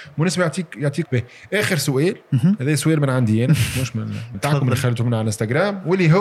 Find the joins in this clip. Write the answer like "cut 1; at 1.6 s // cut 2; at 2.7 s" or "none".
cut 1; at 1.0 s // cut 2; at 4.3 s